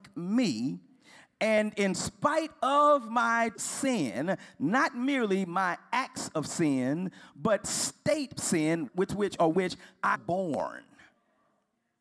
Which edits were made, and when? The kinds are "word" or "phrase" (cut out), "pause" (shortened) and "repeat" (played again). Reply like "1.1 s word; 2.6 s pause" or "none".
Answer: 3.5 s word; 7.6 s word; 8.4 s word; 8.9 s word; 9.5 s word; 10.1 s word